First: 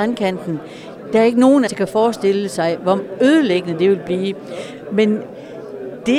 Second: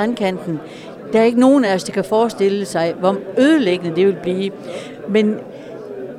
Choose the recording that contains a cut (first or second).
first